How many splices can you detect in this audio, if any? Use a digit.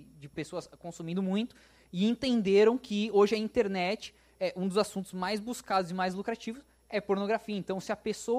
0